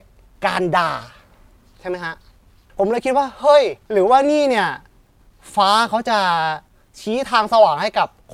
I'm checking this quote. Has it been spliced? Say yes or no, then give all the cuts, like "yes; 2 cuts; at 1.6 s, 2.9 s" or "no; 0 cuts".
no; 0 cuts